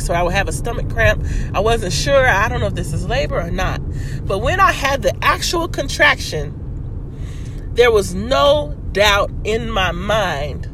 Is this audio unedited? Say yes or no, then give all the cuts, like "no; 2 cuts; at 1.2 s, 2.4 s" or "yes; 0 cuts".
yes; 0 cuts